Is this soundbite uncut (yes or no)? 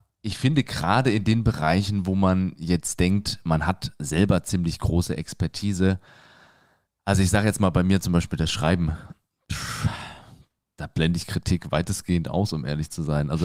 yes